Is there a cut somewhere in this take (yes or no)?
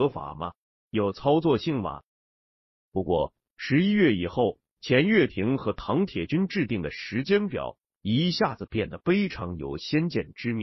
yes